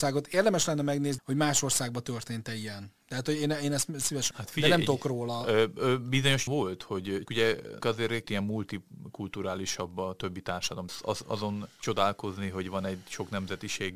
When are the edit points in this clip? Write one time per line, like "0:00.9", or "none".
0:01.2
0:03.0
0:04.3
0:06.5
0:07.3
0:07.8
0:08.2
0:10.9